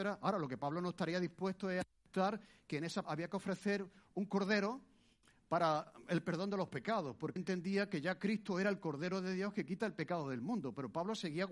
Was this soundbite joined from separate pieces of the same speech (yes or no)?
yes